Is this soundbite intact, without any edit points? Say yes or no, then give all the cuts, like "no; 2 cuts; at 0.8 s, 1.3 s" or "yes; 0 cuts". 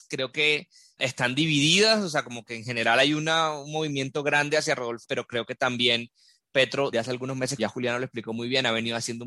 no; 4 cuts; at 1.0 s, 5.0 s, 6.9 s, 7.6 s